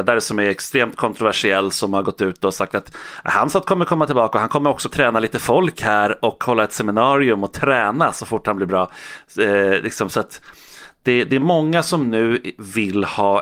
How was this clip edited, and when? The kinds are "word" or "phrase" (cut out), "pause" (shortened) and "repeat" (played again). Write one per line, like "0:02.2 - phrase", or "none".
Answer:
0:04.9 - phrase